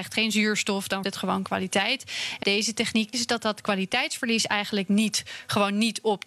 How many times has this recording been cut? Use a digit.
3